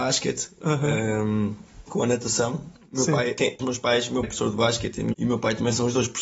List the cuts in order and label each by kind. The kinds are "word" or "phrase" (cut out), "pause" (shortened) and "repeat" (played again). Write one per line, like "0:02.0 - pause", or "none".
0:01.9 - word
0:03.6 - word
0:04.2 - word
0:05.1 - word